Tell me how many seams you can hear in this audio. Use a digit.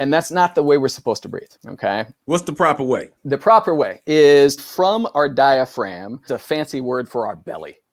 4